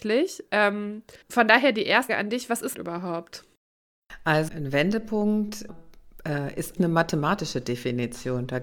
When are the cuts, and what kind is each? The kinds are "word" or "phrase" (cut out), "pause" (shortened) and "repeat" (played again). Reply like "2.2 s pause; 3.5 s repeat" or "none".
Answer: 1.2 s pause; 2.1 s word; 2.7 s phrase; 4.5 s word; 5.7 s word; 6.8 s word